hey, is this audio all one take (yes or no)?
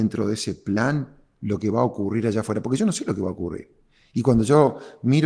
yes